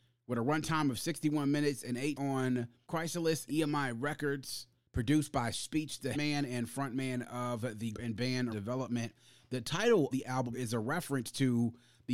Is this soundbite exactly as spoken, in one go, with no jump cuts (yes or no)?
no